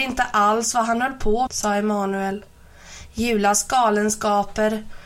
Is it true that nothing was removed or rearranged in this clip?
no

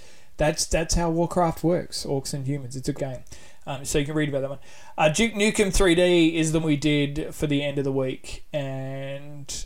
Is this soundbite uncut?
no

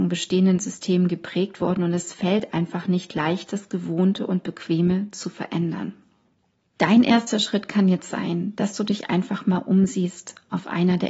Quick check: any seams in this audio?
no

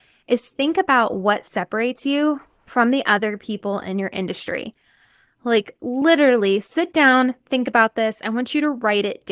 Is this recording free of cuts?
yes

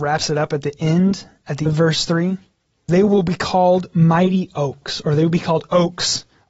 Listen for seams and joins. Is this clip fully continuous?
no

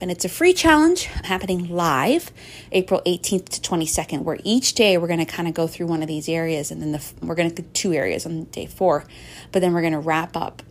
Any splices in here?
yes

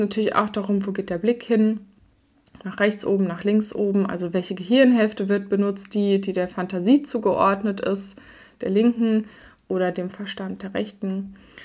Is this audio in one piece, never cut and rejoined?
yes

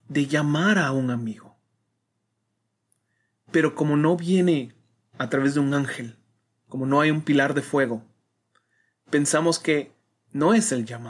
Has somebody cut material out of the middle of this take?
no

